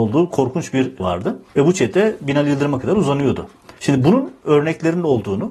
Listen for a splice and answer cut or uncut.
cut